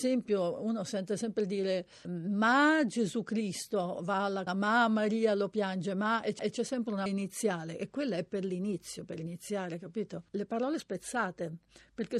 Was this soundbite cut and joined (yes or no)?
yes